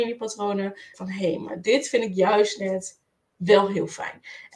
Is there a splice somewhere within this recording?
yes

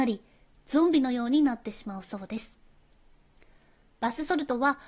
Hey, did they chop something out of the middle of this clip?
no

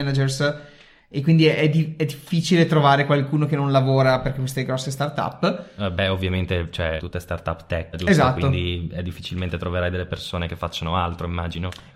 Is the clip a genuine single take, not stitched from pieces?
no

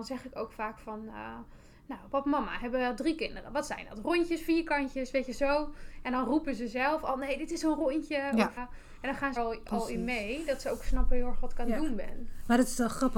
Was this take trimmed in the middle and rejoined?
yes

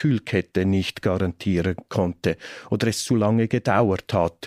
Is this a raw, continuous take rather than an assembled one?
yes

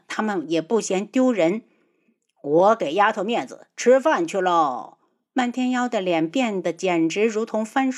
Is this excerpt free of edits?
yes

